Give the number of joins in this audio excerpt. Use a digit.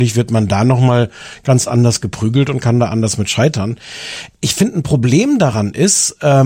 0